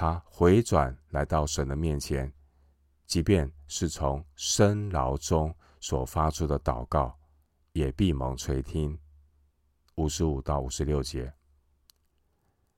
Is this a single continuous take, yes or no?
yes